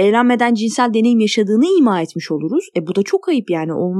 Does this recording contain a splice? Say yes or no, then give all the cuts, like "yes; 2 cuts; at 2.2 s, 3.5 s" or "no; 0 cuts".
no; 0 cuts